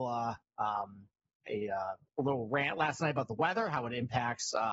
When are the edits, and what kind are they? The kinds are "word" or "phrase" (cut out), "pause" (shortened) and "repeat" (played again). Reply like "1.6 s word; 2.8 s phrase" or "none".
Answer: 1.5 s word